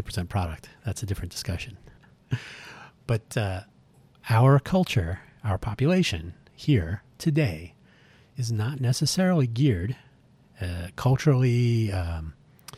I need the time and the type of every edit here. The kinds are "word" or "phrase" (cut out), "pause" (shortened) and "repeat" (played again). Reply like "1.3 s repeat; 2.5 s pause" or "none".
none